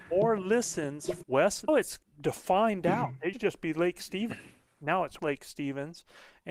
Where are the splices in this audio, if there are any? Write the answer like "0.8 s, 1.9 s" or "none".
1.2 s, 1.7 s, 2.0 s, 3.3 s, 5.2 s